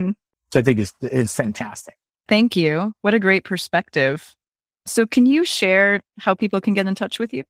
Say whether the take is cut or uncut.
uncut